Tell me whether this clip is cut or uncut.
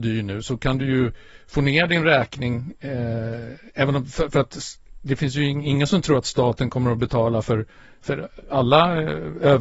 uncut